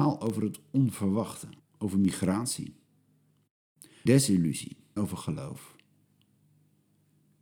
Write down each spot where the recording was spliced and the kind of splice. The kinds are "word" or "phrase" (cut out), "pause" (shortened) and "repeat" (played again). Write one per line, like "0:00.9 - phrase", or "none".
0:01.6 - pause
0:04.1 - word
0:05.0 - word